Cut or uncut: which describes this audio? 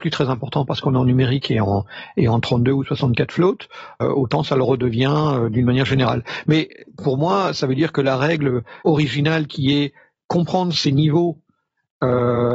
cut